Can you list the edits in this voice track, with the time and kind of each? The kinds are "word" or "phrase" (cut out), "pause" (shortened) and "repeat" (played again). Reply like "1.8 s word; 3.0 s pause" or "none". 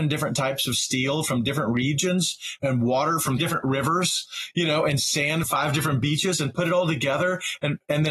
2.6 s word; 3.4 s word; 5.4 s word